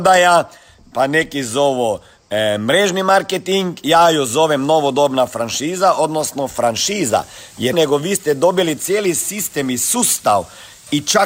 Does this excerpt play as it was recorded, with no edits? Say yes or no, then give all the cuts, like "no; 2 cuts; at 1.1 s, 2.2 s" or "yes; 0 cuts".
no; 1 cut; at 7.7 s